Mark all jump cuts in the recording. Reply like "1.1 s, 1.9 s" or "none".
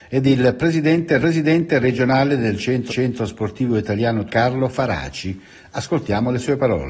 1.2 s, 2.9 s, 4.3 s